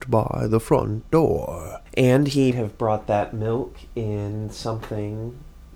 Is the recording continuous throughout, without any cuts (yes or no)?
no